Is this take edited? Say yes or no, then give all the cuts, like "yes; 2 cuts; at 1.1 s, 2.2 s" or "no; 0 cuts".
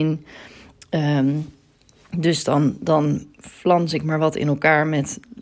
no; 0 cuts